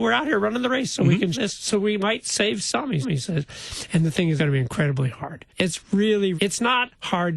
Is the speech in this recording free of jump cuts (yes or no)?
no